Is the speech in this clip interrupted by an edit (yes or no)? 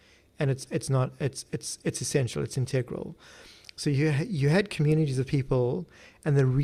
no